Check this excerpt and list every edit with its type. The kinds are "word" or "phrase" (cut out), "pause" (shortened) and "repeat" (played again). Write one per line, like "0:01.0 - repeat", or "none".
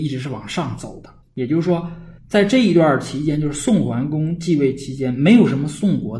0:01.2 - pause
0:02.2 - pause